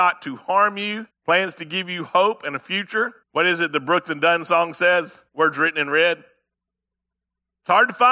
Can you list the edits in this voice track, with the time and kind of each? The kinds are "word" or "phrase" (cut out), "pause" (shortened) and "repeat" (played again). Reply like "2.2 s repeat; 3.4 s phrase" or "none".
1.1 s pause; 3.2 s pause; 5.3 s pause

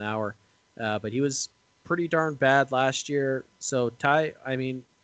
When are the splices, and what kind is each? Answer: none

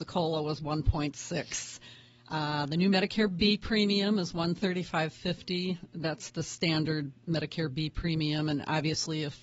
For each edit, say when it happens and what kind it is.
none

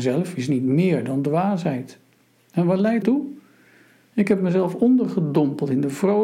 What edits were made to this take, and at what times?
3.0 s word

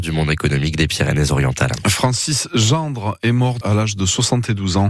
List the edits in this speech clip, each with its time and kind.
3.6 s word

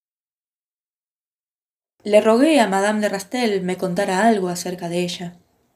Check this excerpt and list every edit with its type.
none

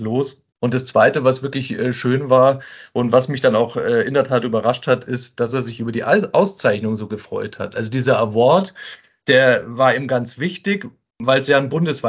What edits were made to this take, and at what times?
none

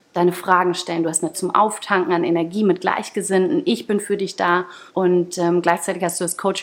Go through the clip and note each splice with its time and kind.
1.3 s word; 4.9 s pause

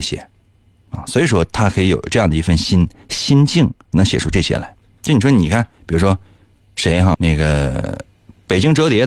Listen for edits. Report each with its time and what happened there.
7.1 s word

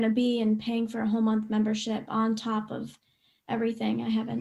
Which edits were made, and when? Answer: none

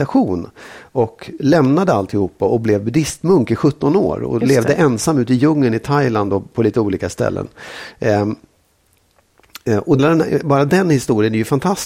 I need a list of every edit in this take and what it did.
10.0 s phrase

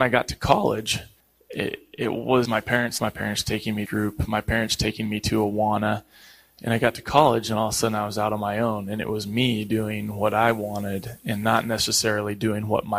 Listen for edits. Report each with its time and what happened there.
1.2 s pause; 2.5 s word; 3.0 s phrase; 3.9 s word

